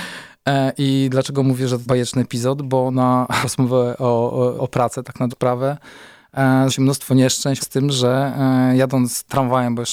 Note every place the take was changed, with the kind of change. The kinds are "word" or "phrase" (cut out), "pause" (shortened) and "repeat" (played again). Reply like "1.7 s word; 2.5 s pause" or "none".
1.9 s word; 3.4 s word; 4.6 s word; 5.3 s word; 6.7 s word; 7.6 s word